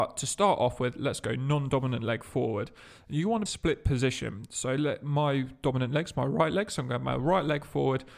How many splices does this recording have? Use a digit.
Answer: 1